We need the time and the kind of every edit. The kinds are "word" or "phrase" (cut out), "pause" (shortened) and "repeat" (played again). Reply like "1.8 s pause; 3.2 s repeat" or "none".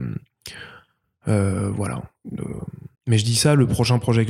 2.9 s pause